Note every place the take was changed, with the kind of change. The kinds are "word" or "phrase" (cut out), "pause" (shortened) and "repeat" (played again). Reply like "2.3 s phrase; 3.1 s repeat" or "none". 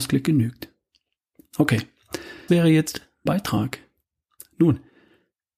2.5 s word; 3.3 s word